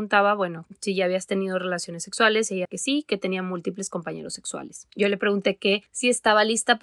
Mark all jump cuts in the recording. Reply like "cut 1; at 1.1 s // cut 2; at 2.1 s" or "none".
cut 1; at 2.6 s